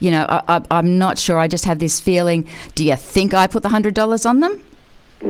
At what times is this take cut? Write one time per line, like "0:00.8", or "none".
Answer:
none